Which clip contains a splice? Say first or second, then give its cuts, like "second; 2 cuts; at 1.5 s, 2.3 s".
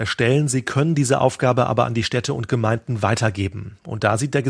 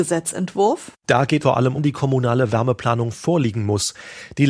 second; 2 cuts; at 1.4 s, 1.8 s